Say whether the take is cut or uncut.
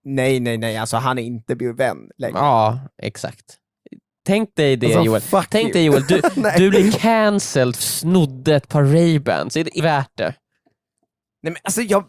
cut